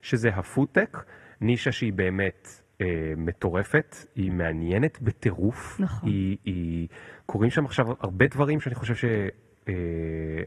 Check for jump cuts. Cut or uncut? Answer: uncut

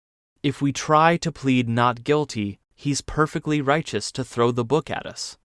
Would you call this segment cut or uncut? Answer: uncut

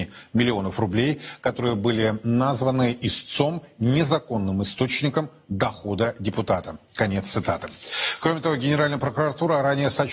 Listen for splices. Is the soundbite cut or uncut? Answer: uncut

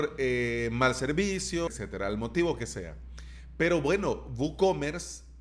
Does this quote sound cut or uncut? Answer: cut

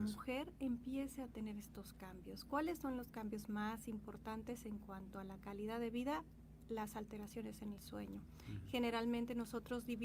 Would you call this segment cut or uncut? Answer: uncut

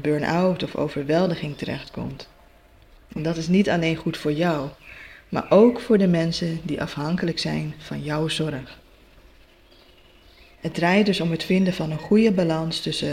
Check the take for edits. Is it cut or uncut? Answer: uncut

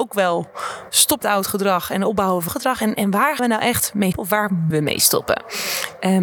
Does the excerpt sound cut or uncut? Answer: cut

